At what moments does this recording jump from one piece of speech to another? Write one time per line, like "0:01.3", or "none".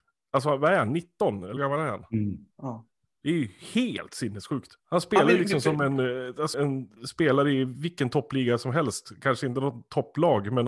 0:01.6
0:02.5
0:04.8
0:06.5
0:07.0